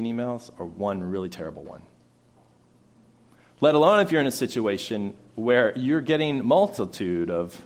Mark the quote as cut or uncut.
uncut